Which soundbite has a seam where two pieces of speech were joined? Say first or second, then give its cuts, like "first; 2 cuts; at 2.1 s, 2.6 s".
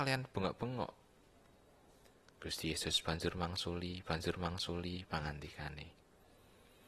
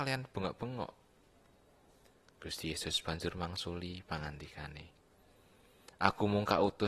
first; 1 cut; at 4.1 s